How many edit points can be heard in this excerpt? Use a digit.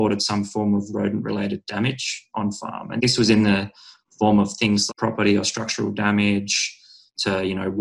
2